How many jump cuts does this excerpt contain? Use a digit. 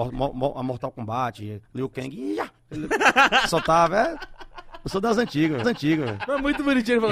3